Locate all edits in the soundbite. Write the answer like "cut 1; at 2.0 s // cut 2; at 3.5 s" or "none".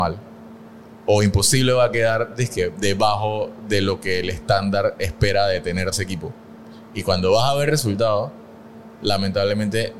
cut 1; at 5.9 s